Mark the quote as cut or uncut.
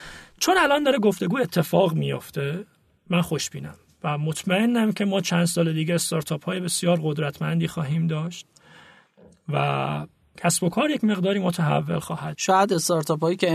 cut